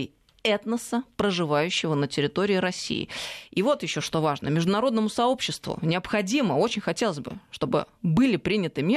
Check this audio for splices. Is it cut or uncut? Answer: uncut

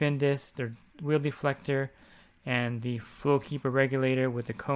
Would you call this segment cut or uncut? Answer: uncut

